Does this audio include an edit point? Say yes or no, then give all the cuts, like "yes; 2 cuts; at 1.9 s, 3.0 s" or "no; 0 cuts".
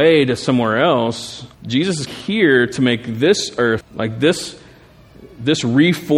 yes; 3 cuts; at 1.5 s, 2.1 s, 3.8 s